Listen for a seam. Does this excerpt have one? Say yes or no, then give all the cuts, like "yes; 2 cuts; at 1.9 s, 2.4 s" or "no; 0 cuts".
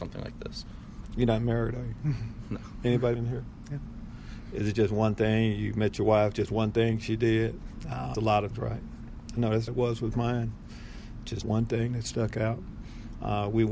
yes; 5 cuts; at 3.2 s, 8.1 s, 8.5 s, 9.7 s, 11.4 s